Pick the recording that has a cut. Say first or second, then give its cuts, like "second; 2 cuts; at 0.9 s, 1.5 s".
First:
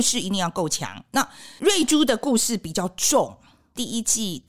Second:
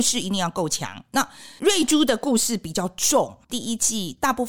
second; 1 cut; at 3.4 s